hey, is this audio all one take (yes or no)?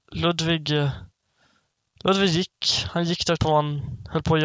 no